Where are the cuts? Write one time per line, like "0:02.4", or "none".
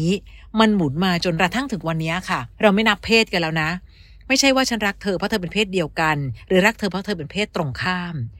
0:02.5

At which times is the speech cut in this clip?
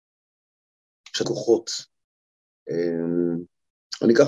0:01.2

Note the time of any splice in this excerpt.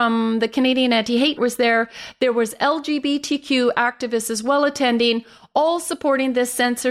0:01.4

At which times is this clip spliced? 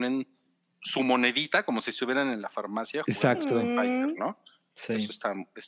none

